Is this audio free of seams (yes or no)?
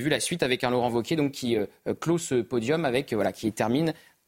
yes